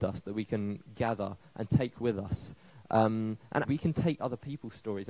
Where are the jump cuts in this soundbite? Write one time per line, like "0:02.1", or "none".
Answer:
0:03.6